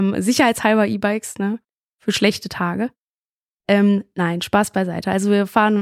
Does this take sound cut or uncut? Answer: uncut